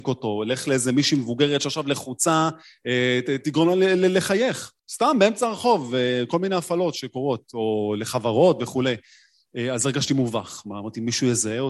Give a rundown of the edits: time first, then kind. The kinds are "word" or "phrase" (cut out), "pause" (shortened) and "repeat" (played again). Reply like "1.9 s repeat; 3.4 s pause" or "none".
4.8 s pause